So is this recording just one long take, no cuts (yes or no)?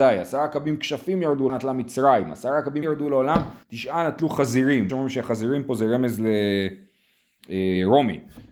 no